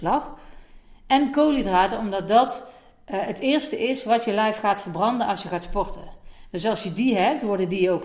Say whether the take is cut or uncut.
uncut